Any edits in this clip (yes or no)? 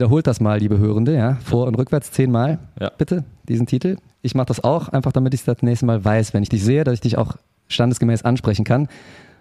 no